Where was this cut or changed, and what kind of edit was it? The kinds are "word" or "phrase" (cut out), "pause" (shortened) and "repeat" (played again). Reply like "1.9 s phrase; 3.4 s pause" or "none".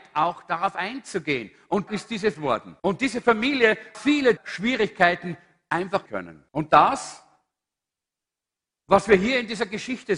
1.9 s word; 2.3 s phrase; 2.8 s pause; 3.9 s word; 4.4 s word; 6.1 s word; 6.5 s pause